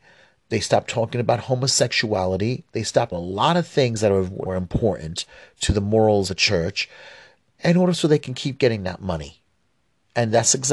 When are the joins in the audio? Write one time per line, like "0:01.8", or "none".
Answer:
0:03.1
0:04.5
0:06.3